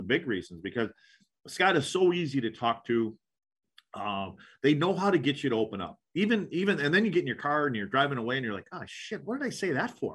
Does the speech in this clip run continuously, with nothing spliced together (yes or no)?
yes